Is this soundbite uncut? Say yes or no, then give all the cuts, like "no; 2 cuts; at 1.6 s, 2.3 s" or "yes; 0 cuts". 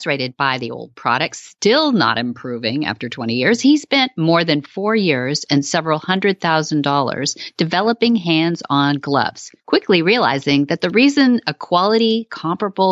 no; 1 cut; at 9.6 s